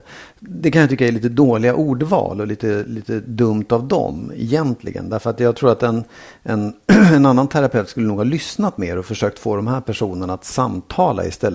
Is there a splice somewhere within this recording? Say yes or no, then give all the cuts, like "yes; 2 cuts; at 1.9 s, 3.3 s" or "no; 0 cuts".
no; 0 cuts